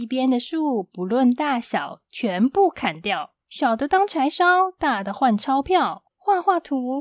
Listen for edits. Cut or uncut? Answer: cut